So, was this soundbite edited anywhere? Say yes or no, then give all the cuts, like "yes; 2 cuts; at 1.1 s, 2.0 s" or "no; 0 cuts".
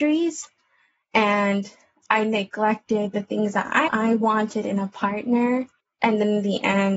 yes; 1 cut; at 3.9 s